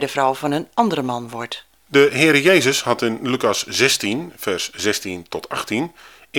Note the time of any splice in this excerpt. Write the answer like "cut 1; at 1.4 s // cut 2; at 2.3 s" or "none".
cut 1; at 1.8 s